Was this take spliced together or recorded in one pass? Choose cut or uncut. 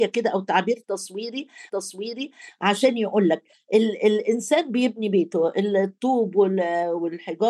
cut